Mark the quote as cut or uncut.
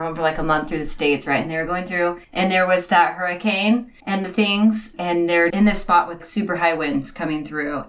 cut